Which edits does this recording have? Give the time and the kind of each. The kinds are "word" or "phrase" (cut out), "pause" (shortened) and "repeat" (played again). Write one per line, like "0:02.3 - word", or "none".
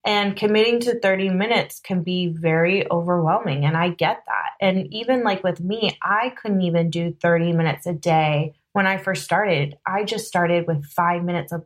none